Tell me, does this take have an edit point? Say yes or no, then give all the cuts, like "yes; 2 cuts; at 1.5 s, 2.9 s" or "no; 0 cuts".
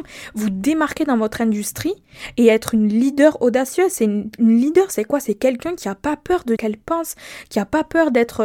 yes; 1 cut; at 6.6 s